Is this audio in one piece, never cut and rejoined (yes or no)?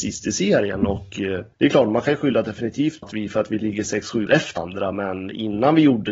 no